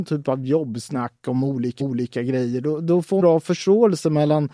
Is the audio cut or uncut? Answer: cut